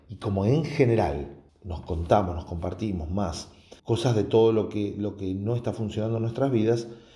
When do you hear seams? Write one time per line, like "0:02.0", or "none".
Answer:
0:01.5
0:03.8